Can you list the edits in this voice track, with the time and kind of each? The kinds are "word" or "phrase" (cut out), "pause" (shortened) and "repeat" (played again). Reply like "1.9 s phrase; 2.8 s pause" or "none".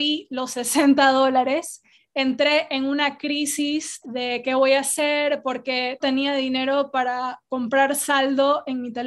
1.9 s pause; 4.0 s word; 6.0 s word